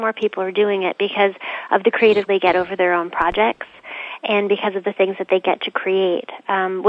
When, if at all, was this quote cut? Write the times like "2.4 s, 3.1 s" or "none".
2.3 s